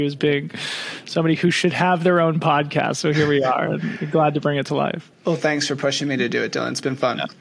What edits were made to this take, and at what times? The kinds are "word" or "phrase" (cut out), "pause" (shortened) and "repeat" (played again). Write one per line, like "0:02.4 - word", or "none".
0:05.1 - pause

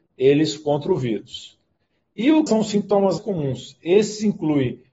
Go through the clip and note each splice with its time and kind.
0:02.5 - word
0:03.2 - word

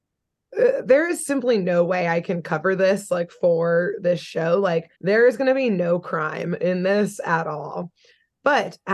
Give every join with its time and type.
0:04.9 - pause

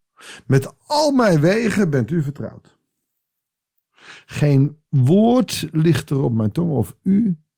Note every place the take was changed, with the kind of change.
0:04.9 - pause

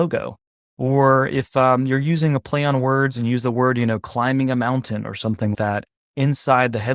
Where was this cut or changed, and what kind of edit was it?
0:05.5 - word

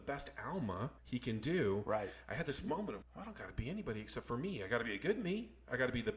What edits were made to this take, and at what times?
0:01.0 - pause
0:03.0 - word

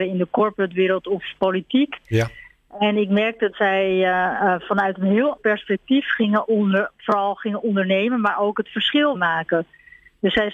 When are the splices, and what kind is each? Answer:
0:03.5 - word
0:05.4 - word
0:09.1 - word

